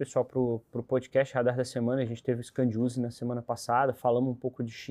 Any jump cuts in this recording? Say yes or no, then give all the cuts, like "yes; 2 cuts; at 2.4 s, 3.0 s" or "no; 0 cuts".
no; 0 cuts